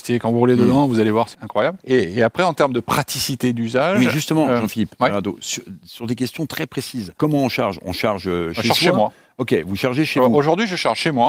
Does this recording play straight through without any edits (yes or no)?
no